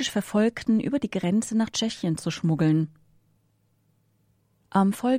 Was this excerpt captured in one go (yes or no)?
yes